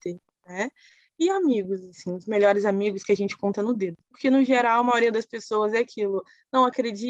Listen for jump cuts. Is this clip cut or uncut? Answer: cut